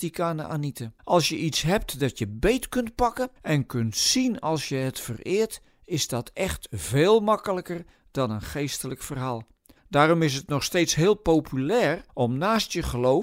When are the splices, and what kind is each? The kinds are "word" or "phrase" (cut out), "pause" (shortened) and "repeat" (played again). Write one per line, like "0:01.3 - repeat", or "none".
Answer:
0:01.0 - pause
0:03.4 - pause
0:09.8 - pause
0:12.1 - pause